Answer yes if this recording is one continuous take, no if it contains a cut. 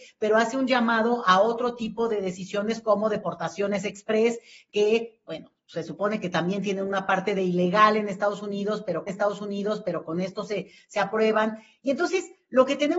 no